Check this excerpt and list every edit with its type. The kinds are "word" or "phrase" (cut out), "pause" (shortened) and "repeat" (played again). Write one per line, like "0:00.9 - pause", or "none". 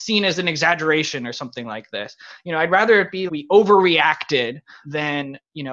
0:03.3 - word